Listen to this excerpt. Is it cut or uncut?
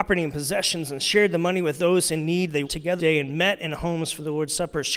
cut